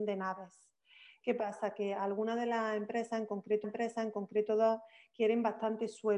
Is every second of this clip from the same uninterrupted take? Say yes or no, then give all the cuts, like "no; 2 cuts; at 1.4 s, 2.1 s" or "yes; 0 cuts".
no; 1 cut; at 3.6 s